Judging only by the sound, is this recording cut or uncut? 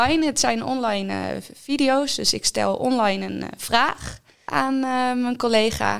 uncut